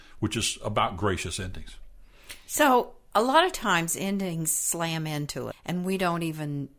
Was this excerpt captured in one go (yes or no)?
no